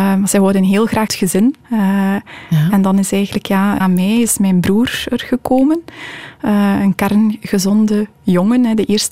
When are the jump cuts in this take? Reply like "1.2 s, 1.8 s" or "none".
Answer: 1.1 s, 1.6 s, 3.8 s